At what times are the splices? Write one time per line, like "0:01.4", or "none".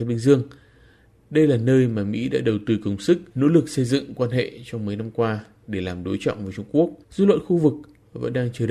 0:03.3
0:07.0